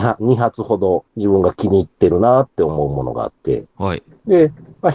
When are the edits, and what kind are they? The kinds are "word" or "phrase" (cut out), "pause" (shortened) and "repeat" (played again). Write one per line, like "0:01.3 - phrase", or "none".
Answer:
0:01.1 - pause